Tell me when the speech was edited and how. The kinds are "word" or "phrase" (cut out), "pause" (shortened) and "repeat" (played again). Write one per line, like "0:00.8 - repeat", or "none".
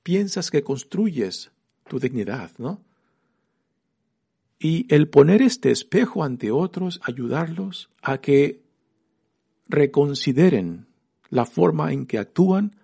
0:01.8 - phrase
0:07.0 - word
0:08.0 - pause